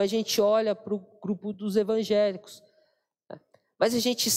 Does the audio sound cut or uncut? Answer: uncut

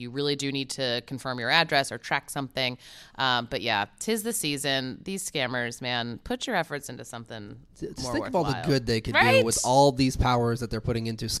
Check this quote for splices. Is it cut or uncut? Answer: uncut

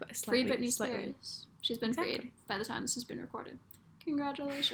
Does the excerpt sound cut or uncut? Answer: uncut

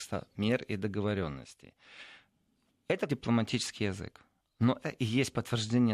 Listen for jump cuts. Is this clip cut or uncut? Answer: cut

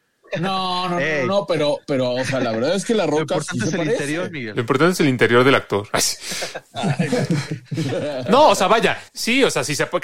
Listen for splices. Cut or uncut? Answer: cut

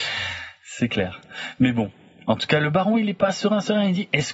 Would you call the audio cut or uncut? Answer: uncut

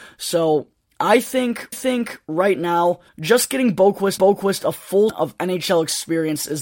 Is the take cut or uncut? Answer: cut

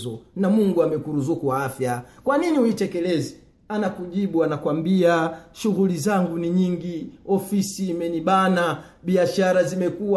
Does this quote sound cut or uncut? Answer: uncut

